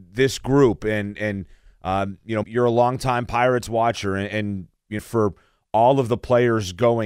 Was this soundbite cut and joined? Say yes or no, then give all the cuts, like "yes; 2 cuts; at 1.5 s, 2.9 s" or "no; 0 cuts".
yes; 2 cuts; at 2.4 s, 5.0 s